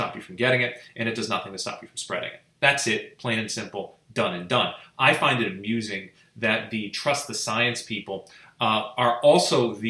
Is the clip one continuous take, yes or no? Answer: yes